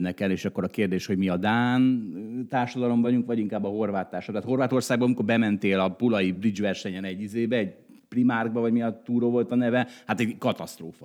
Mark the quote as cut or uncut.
uncut